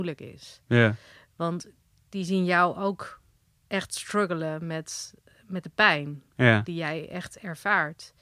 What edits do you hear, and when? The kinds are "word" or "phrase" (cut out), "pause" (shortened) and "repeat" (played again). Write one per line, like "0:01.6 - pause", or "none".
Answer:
none